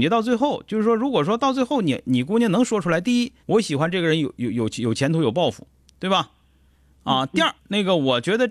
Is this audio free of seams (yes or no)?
no